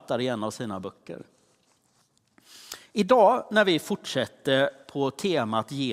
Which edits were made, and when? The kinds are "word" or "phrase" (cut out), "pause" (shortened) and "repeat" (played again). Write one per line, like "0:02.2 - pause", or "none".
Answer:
none